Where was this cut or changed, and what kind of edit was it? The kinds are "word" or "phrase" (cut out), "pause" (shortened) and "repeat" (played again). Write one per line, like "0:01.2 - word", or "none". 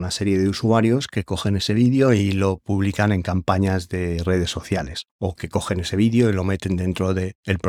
none